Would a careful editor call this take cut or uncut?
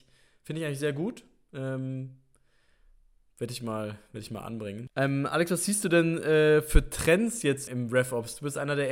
cut